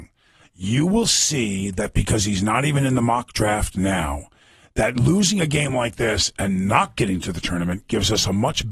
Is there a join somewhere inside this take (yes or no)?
no